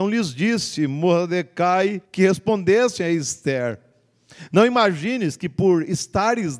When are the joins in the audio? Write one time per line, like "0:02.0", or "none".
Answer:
0:02.0